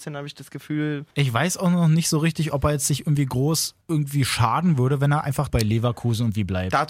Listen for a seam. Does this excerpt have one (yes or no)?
yes